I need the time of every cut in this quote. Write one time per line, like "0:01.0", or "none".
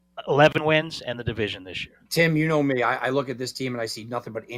0:02.0